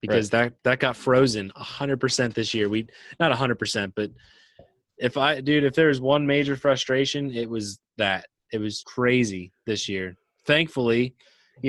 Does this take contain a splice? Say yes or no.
yes